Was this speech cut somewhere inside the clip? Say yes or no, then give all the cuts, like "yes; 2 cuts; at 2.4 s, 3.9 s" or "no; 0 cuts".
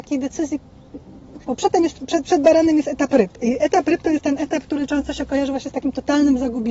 yes; 1 cut; at 1.4 s